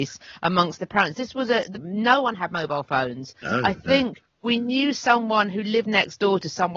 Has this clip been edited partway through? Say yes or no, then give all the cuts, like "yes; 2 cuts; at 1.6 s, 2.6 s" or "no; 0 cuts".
no; 0 cuts